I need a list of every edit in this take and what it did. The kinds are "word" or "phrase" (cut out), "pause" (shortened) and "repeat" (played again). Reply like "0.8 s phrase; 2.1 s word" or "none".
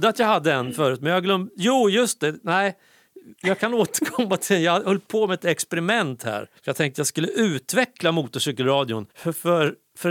3.3 s pause; 6.6 s pause; 9.1 s pause